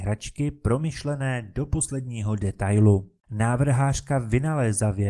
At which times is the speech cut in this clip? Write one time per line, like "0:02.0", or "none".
0:03.2